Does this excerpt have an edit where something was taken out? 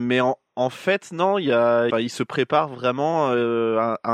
yes; 1 cut; at 1.9 s

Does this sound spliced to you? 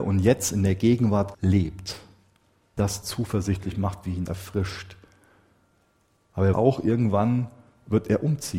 yes; 4 cuts; at 1.3 s, 2.8 s, 4.3 s, 6.5 s

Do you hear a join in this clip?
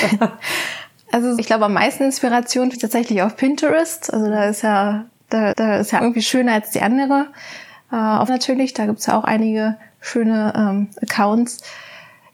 yes; 5 cuts; at 1.4 s, 2.7 s, 5.5 s, 6.0 s, 8.3 s

